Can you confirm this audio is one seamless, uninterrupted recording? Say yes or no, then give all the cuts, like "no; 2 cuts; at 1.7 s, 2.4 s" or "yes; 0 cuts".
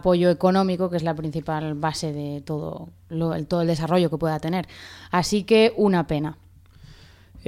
yes; 0 cuts